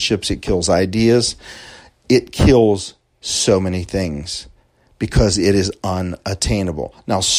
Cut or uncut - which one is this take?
uncut